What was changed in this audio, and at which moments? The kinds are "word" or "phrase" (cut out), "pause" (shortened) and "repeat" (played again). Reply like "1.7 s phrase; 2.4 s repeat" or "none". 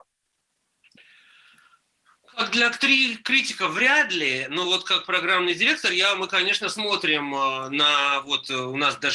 none